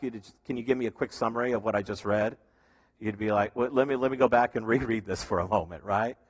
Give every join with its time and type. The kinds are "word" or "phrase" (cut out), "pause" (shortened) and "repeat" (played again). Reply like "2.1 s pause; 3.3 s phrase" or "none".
none